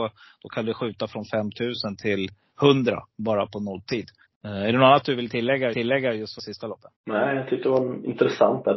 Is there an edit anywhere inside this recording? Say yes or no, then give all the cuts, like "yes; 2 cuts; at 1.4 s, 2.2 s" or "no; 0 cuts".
yes; 4 cuts; at 4.2 s, 5.7 s, 6.4 s, 7.0 s